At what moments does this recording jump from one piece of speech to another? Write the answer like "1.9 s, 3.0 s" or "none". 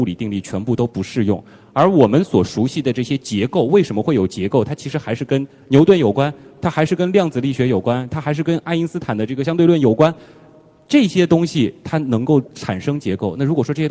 none